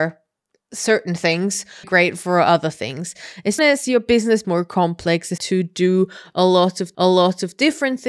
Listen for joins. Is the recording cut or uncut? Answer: cut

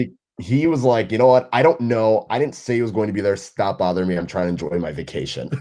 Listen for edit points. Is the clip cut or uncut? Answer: uncut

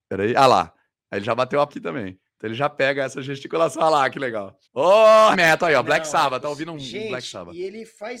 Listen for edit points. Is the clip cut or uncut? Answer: cut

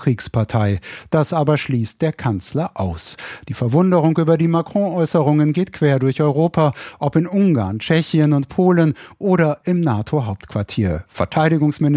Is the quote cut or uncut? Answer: uncut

